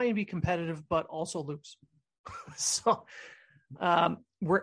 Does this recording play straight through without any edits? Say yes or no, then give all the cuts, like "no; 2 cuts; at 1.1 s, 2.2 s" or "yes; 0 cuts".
yes; 0 cuts